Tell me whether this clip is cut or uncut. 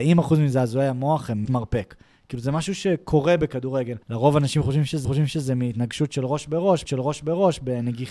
cut